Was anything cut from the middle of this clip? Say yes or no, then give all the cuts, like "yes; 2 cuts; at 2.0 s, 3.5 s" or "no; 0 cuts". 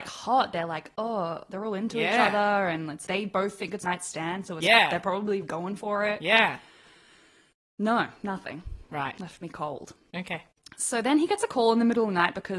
yes; 3 cuts; at 3.1 s, 3.8 s, 5.4 s